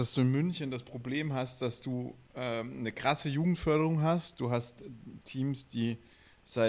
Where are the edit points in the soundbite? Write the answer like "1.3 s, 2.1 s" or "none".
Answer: none